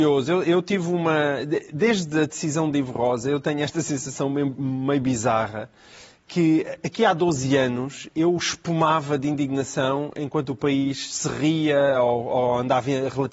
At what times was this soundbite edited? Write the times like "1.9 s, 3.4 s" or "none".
none